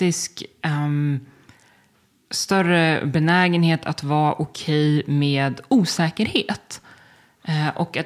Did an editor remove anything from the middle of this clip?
no; 0 cuts

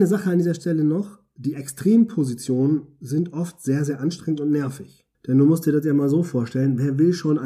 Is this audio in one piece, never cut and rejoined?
no; 1 cut; at 5.1 s

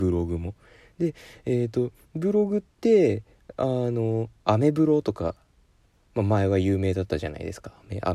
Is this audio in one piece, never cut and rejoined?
yes; 0 cuts

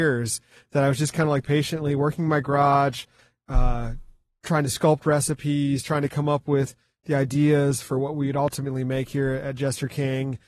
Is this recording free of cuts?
yes; 0 cuts

